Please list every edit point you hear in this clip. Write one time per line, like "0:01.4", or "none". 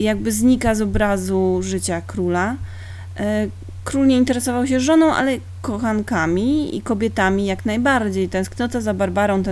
none